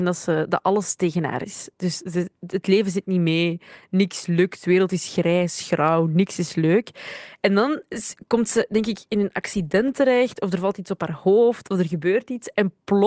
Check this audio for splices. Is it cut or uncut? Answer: uncut